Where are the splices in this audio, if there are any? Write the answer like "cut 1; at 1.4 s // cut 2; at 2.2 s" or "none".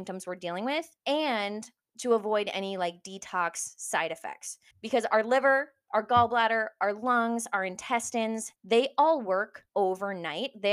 cut 1; at 1.0 s // cut 2; at 4.7 s // cut 3; at 8.6 s // cut 4; at 9.7 s